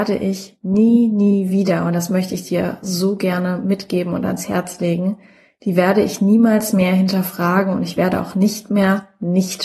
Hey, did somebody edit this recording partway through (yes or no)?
no